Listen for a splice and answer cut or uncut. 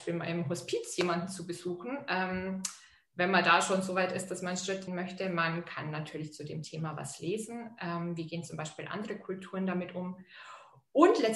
cut